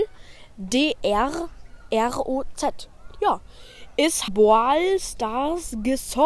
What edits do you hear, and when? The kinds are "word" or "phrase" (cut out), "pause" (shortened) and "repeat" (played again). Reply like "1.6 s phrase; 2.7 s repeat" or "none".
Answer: 1.0 s word; 4.3 s phrase